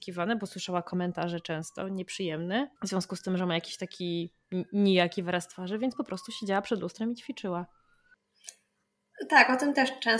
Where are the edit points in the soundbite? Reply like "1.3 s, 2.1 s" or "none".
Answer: 2.8 s